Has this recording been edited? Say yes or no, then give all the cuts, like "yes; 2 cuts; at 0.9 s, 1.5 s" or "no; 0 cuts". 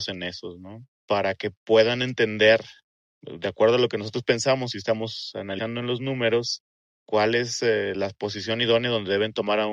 no; 0 cuts